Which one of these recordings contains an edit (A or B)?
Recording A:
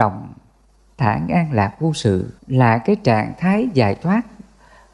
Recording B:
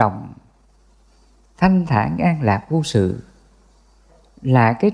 A